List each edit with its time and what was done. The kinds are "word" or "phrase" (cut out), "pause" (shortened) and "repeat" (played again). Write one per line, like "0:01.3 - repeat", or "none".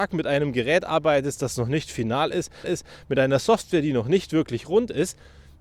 0:02.6 - repeat